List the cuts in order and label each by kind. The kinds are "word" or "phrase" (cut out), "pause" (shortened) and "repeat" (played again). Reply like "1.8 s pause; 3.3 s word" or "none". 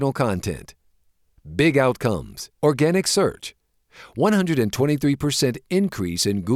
2.6 s pause